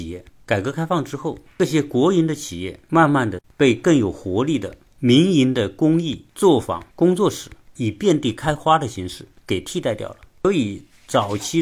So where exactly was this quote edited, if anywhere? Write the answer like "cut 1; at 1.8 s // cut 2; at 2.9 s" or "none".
cut 1; at 6.3 s // cut 2; at 6.9 s